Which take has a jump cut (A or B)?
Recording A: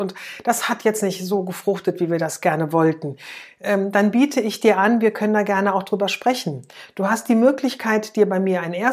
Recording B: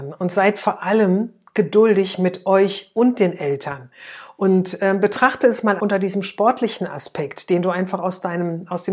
B